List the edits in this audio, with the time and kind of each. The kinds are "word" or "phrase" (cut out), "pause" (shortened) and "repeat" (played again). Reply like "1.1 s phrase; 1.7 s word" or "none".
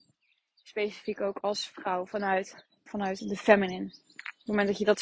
2.9 s word